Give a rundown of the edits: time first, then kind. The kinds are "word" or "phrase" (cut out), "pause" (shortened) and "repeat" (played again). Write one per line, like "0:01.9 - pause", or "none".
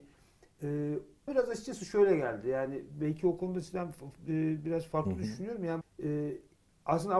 0:01.3 - word
0:05.8 - word